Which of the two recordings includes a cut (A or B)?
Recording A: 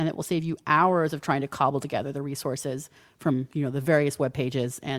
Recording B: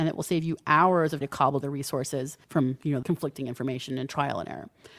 B